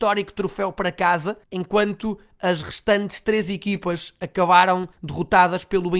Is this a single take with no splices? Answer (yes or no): no